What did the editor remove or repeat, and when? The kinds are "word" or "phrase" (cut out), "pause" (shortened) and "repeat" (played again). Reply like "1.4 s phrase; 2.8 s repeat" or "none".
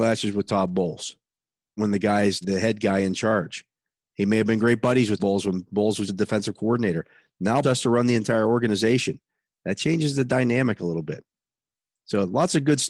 1.8 s word; 2.4 s word; 5.2 s word; 6.1 s word; 7.6 s word